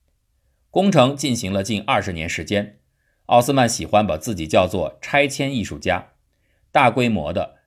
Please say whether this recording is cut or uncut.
uncut